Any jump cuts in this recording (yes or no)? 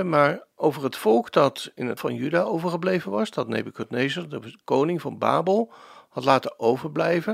yes